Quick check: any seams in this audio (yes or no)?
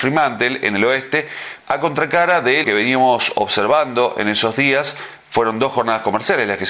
yes